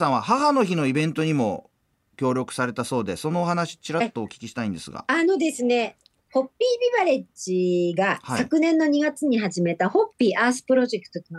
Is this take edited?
no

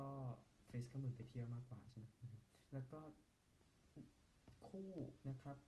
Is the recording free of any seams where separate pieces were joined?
no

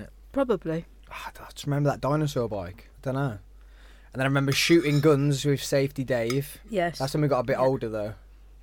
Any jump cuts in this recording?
yes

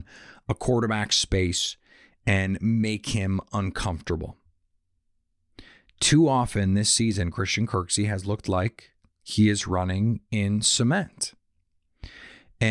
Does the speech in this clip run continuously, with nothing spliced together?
yes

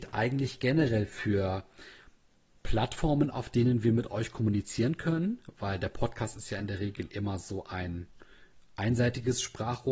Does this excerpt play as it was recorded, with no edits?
yes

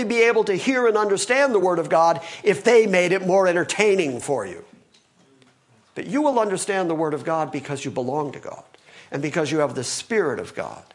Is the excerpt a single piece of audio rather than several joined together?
yes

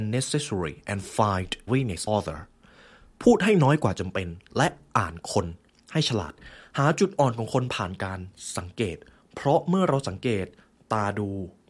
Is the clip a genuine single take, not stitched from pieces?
no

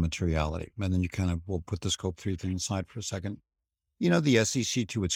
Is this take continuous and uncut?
yes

